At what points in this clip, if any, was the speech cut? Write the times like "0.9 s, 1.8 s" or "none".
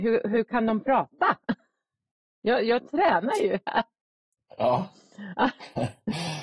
none